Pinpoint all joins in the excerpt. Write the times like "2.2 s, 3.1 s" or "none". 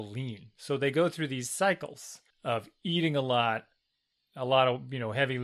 2.3 s